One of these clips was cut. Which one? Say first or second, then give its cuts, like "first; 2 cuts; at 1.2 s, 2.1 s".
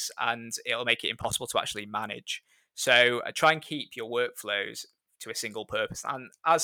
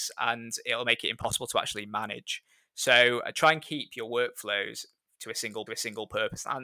second; 1 cut; at 5.7 s